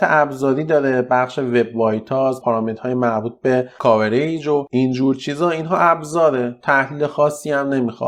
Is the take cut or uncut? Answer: uncut